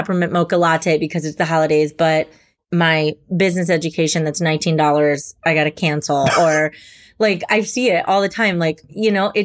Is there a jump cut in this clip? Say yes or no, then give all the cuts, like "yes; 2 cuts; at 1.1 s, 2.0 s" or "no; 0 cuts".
no; 0 cuts